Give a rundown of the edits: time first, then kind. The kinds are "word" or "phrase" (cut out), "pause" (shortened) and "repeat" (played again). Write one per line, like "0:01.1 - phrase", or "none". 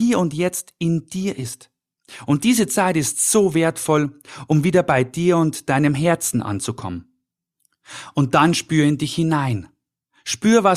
none

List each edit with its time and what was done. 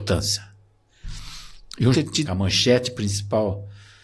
0:01.9 - phrase
0:02.3 - word

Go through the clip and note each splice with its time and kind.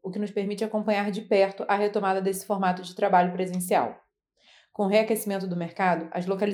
none

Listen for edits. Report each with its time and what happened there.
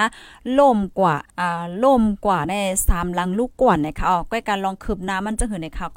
0:01.3 - pause

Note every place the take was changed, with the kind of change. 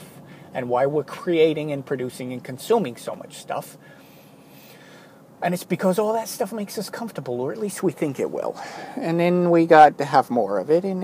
none

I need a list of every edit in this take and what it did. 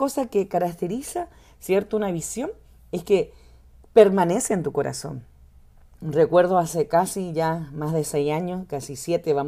none

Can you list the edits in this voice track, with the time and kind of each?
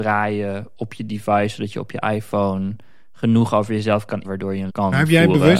0:04.2 - word
0:04.7 - phrase

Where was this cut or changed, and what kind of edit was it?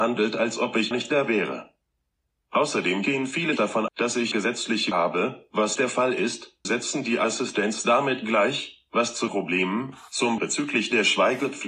0:00.9 - word
0:03.6 - word
0:03.9 - word
0:04.3 - word
0:04.9 - word
0:05.8 - word
0:06.6 - word
0:09.3 - word
0:10.4 - word

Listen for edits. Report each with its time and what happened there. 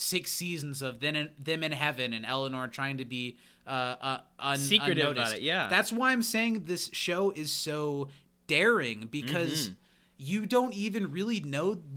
none

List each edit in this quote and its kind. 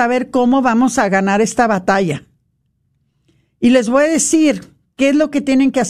none

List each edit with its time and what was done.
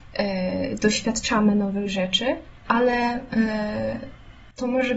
0:02.6 - pause

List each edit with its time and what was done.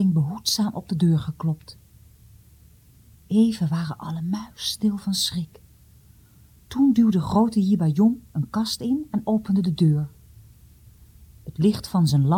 none

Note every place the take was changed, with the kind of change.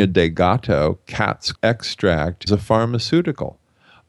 0:01.5 - word
0:02.5 - word

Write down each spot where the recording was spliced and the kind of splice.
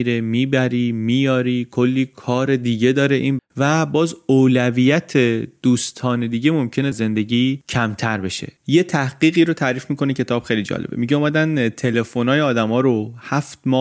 0:03.4 - word
0:06.9 - word
0:08.6 - pause

